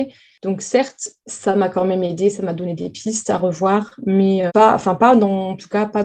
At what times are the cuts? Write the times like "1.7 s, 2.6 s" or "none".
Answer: 4.5 s